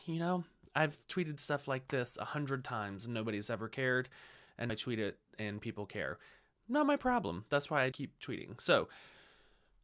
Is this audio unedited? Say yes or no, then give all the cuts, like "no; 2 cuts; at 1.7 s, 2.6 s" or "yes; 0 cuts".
no; 2 cuts; at 4.7 s, 7.9 s